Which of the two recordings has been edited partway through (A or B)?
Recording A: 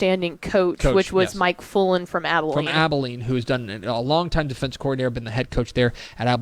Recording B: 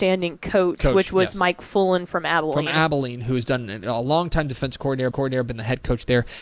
B